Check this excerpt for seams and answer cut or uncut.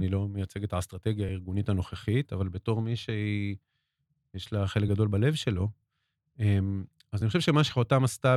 uncut